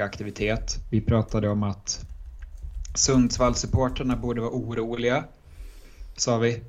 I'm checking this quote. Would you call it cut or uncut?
uncut